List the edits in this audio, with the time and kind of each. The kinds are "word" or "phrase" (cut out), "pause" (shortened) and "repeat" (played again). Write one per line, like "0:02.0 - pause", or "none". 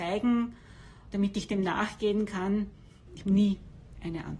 0:01.1 - word
0:03.2 - word